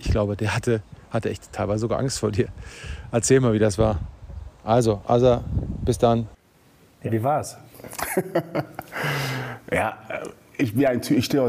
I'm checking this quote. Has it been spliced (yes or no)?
no